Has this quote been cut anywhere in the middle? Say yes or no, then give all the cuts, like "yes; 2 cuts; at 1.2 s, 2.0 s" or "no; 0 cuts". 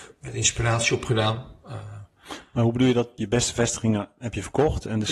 no; 0 cuts